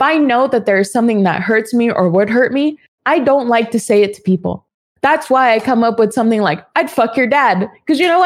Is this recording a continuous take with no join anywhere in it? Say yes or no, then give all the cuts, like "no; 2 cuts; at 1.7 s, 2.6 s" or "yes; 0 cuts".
yes; 0 cuts